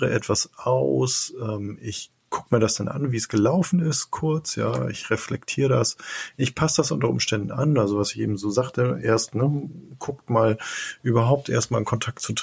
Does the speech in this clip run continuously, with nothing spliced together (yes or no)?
yes